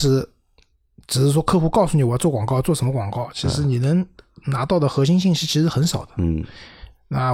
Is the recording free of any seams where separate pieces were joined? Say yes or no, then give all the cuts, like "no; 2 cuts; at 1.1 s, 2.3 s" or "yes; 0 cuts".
yes; 0 cuts